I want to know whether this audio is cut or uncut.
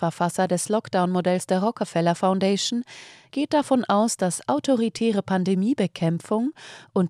uncut